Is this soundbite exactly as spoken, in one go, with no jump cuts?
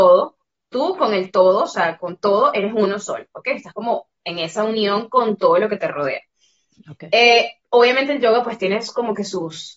yes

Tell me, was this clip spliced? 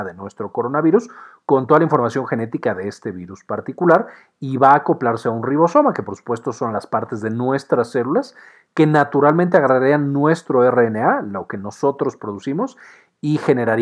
no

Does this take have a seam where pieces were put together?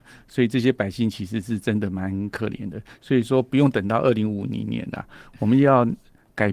no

